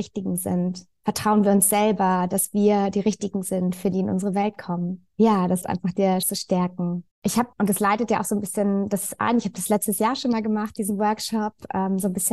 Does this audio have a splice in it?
yes; 7 cuts; at 1.0 s, 3.9 s, 5.1 s, 5.6 s, 6.2 s, 7.1 s, 7.5 s

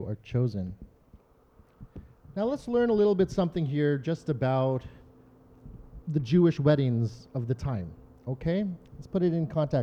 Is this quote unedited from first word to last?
yes; 0 cuts

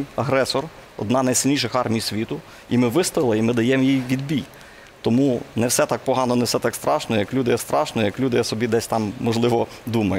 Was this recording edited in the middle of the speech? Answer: yes; 1 cut; at 7.6 s

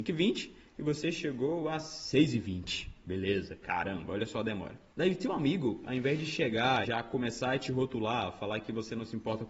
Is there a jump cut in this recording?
yes; 2 cuts; at 4.9 s, 6.8 s

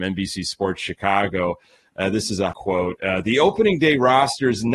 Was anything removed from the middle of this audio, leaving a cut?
yes; 1 cut; at 2.5 s

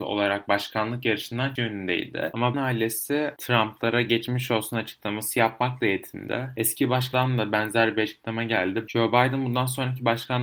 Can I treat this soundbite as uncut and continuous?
no; 3 cuts; at 1.6 s, 2.5 s, 7.1 s

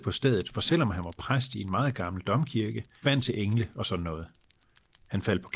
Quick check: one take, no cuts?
no; 1 cut; at 3.0 s

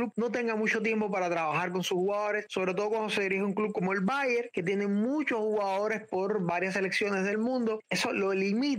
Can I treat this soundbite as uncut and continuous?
yes; 0 cuts

